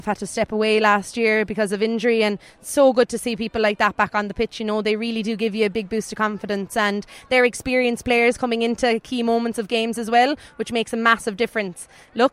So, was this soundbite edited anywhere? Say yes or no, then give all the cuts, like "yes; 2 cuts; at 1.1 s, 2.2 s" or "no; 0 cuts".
no; 0 cuts